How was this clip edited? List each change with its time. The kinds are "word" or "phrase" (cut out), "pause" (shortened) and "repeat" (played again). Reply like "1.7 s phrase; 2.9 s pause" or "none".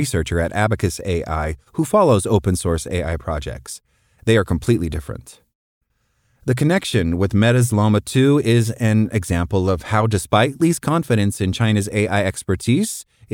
none